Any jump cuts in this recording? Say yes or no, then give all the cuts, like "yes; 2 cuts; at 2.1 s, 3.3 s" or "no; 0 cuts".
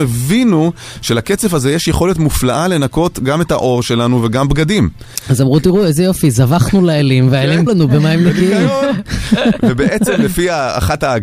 yes; 1 cut; at 7.7 s